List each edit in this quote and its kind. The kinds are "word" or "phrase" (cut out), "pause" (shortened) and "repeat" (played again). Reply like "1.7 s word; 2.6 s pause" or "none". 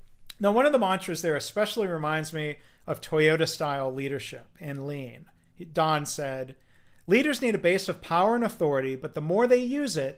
none